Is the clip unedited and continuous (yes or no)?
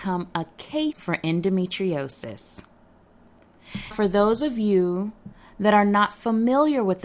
no